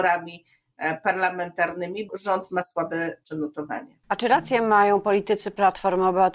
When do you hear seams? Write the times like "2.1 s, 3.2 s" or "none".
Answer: 2.1 s, 3.3 s, 4.0 s